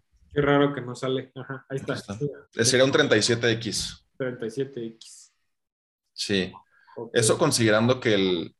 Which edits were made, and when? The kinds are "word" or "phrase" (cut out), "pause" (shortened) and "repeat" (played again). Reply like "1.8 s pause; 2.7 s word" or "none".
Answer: 2.4 s pause; 4.1 s pause